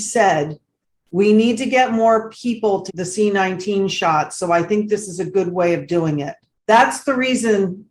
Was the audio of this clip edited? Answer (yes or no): yes